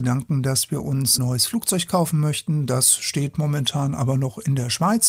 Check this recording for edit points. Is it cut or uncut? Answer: cut